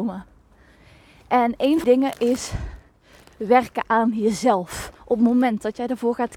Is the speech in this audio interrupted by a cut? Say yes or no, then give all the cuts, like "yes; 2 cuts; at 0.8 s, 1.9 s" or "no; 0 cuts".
yes; 2 cuts; at 1.8 s, 5.0 s